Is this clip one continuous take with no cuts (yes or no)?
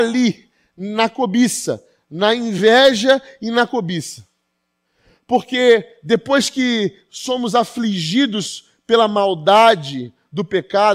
yes